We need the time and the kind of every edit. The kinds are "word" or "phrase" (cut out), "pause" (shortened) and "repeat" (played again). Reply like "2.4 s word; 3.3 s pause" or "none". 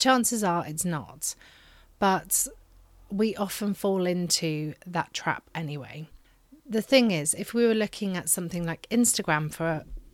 none

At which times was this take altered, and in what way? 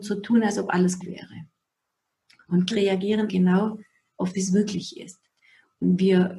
1.0 s word; 2.7 s word; 3.3 s word; 4.3 s word

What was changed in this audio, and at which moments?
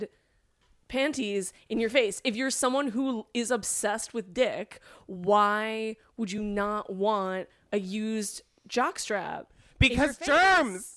none

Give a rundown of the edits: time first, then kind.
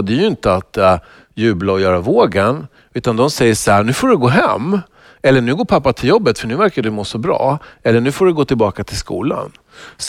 none

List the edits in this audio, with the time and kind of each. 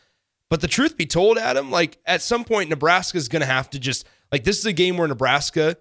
none

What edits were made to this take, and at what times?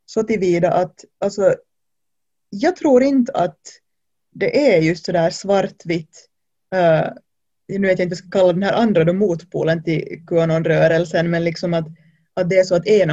none

